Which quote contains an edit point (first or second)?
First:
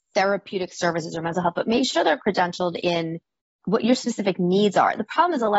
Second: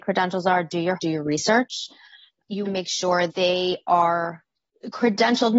second